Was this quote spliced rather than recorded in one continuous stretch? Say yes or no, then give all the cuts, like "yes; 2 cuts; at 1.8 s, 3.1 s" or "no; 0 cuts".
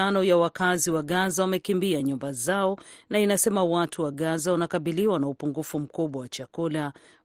no; 0 cuts